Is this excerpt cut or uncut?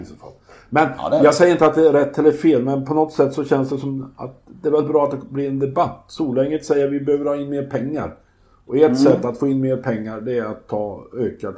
uncut